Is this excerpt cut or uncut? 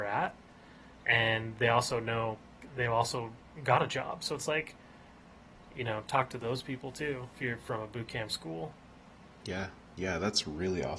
uncut